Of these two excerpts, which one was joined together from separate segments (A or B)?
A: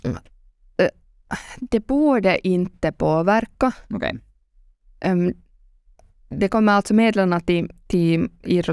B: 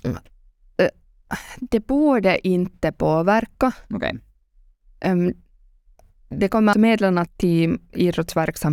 B